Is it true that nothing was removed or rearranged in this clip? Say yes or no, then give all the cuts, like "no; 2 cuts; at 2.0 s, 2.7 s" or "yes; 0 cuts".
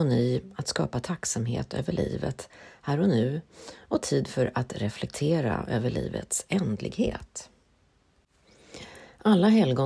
yes; 0 cuts